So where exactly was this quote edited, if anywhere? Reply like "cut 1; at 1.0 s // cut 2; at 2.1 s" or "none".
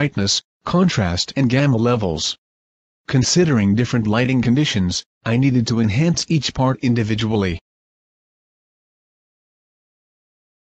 none

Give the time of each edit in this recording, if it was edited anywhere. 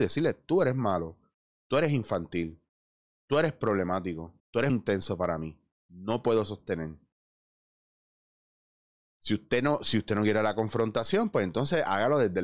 cut 1; at 4.4 s // cut 2; at 4.7 s

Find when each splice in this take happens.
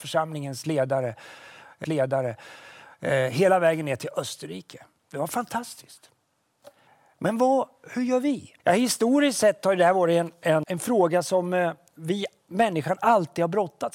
cut 1; at 1.8 s // cut 2; at 6.9 s // cut 3; at 8.6 s // cut 4; at 10.6 s

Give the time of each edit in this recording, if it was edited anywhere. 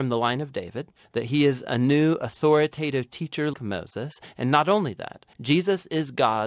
cut 1; at 3.5 s // cut 2; at 5.3 s

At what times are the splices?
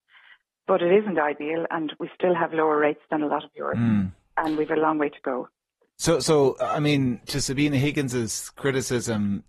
none

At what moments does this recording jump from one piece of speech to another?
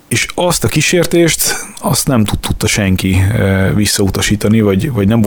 cut 1; at 2.4 s

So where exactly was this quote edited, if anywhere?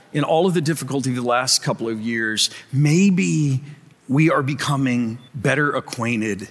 cut 1; at 3.9 s // cut 2; at 5.3 s

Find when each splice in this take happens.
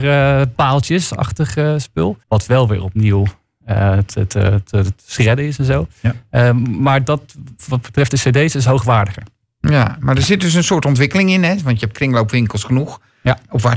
cut 1; at 2.2 s

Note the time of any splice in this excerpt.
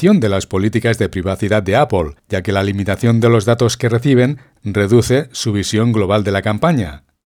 cut 1; at 2.2 s

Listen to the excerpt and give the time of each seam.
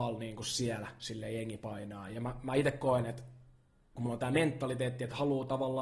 none

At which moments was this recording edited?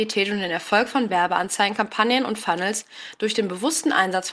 none

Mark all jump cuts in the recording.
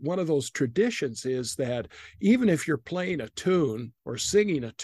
none

